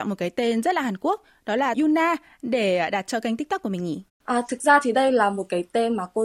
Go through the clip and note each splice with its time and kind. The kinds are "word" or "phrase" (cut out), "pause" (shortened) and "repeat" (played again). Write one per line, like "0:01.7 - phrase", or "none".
0:01.7 - word
0:04.1 - pause